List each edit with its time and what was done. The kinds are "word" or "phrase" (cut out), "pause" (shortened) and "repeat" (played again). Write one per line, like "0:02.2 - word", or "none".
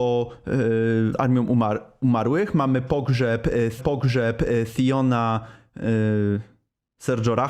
0:01.1 - word
0:03.8 - repeat

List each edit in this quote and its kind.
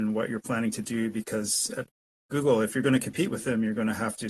none

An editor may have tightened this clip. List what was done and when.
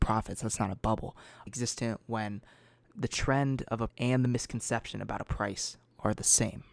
0:01.5 - phrase
0:03.9 - word

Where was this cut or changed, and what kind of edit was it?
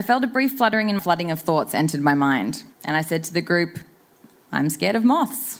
0:01.0 - phrase
0:02.7 - pause

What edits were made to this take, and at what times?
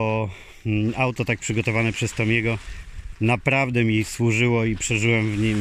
none

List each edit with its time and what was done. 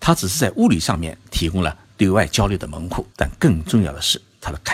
0:03.1 - pause

